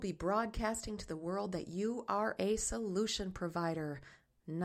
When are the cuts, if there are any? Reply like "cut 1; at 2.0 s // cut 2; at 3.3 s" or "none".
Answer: none